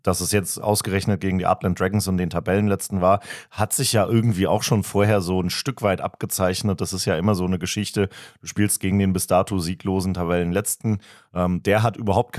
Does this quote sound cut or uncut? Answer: uncut